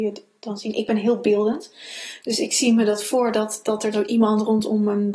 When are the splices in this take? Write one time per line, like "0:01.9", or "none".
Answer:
0:03.9